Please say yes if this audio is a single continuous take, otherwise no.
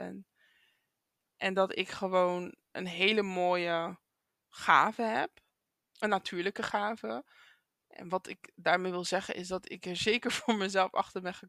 yes